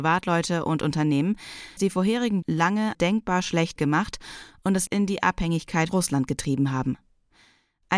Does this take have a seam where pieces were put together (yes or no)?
yes